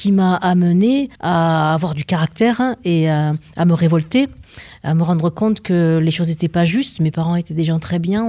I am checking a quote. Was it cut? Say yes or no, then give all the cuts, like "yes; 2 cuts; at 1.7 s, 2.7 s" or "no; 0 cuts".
yes; 1 cut; at 1.1 s